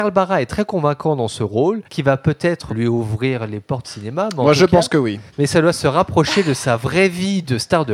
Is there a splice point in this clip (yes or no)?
yes